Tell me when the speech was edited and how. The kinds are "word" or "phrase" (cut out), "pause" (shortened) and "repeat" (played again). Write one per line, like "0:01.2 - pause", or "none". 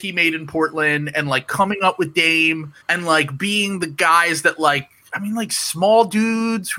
0:02.8 - pause